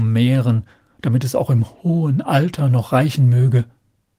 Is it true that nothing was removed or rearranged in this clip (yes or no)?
yes